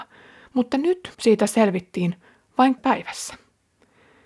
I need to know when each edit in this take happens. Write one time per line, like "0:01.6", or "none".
0:01.1
0:02.8